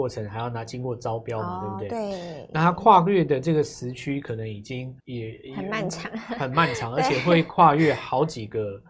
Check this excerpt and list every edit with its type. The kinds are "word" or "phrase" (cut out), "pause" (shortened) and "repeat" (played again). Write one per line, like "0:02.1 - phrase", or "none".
0:05.0 - pause